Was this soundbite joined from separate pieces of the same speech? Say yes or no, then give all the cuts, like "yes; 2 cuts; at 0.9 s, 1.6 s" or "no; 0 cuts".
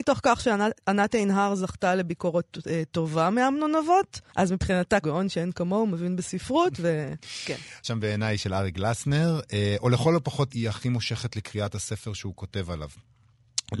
yes; 4 cuts; at 4.3 s, 5.0 s, 7.8 s, 10.5 s